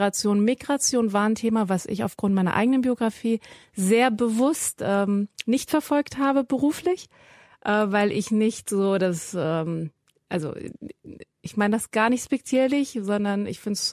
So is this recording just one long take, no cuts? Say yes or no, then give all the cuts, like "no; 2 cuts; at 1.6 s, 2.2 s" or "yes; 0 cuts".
yes; 0 cuts